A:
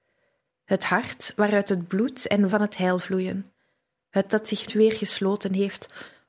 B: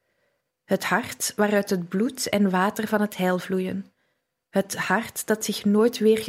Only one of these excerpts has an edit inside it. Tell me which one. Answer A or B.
A